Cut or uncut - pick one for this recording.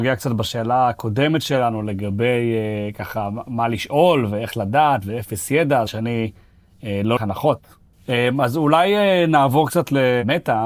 cut